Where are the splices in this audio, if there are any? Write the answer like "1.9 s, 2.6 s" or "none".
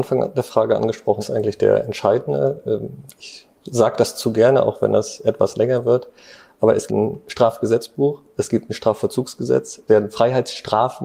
1.2 s, 6.9 s, 9.9 s